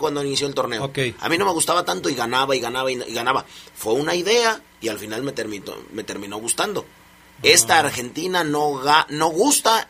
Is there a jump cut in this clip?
no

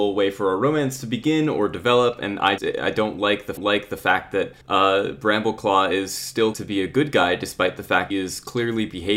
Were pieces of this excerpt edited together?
yes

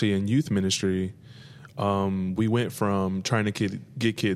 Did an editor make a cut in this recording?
no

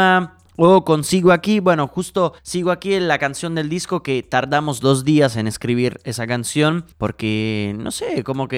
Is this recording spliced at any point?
yes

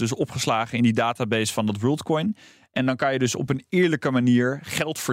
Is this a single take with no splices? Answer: yes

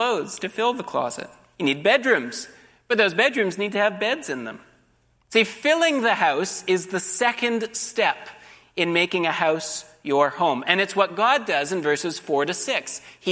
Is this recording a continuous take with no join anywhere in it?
yes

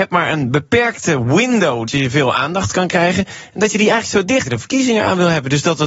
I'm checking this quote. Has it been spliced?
yes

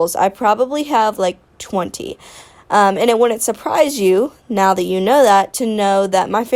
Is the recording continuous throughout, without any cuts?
yes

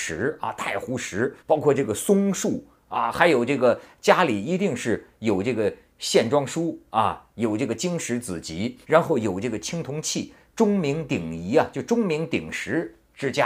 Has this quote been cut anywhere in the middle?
yes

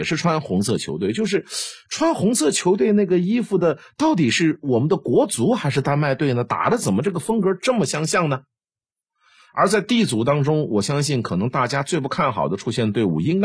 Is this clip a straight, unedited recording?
yes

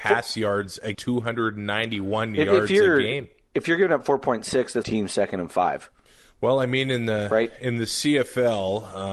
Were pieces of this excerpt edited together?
yes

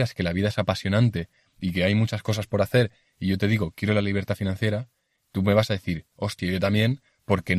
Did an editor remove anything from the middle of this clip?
yes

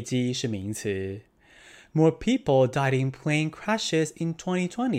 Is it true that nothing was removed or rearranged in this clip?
yes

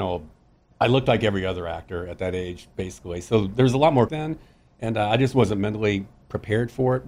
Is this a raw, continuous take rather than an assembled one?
no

